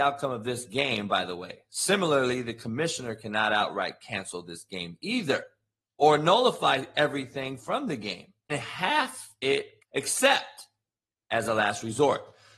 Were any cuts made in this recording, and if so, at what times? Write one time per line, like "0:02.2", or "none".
0:08.5
0:09.8